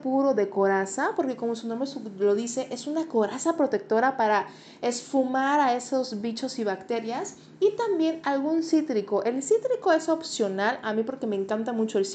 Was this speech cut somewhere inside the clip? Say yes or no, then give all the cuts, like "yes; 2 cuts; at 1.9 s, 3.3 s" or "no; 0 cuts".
no; 0 cuts